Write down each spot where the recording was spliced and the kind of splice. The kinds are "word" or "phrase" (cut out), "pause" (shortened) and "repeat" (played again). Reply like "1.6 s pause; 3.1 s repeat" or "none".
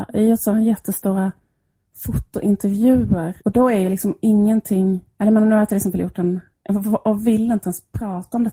3.4 s pause